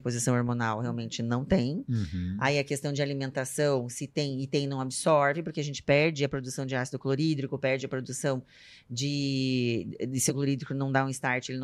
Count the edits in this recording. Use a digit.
1